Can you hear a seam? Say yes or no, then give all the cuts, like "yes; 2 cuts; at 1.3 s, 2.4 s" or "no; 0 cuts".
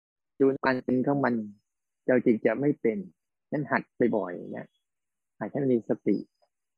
yes; 1 cut; at 3.3 s